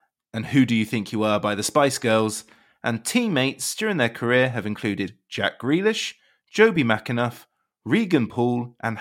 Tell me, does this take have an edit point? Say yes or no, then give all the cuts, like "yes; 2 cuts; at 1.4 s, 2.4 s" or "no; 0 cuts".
no; 0 cuts